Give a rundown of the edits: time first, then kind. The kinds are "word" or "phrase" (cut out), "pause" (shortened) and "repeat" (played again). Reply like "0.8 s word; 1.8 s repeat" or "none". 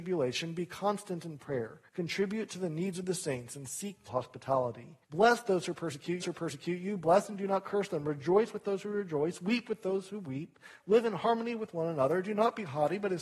1.9 s pause; 4.1 s word; 5.0 s pause; 6.2 s repeat